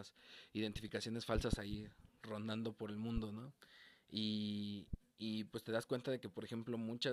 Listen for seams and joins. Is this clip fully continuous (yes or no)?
yes